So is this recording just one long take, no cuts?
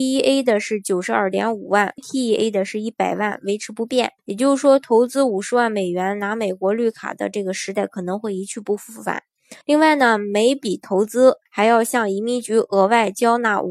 no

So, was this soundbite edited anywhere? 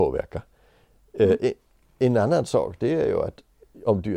no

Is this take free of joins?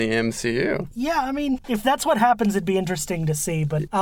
yes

